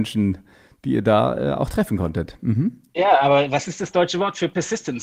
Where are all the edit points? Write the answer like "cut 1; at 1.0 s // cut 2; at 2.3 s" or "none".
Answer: cut 1; at 2.9 s